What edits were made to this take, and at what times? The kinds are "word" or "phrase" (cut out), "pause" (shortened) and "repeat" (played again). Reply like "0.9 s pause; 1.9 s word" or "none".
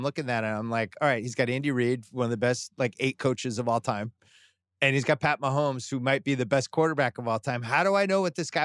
none